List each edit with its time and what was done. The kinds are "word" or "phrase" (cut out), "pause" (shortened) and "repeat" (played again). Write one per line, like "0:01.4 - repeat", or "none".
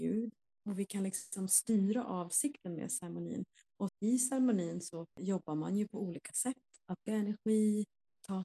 0:03.9 - word
0:05.1 - pause
0:07.1 - word